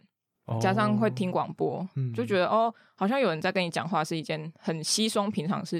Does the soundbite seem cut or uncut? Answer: uncut